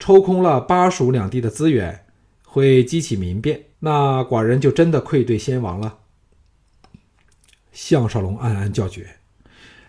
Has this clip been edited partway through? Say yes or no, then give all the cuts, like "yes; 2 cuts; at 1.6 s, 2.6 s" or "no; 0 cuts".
yes; 1 cut; at 3.7 s